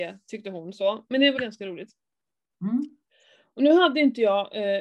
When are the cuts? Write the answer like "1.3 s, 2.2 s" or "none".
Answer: 1.4 s